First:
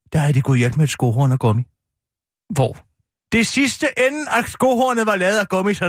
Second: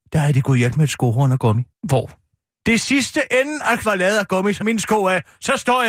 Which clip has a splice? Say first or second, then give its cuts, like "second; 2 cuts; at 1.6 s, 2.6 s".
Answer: second; 3 cuts; at 1.7 s, 3.8 s, 4.6 s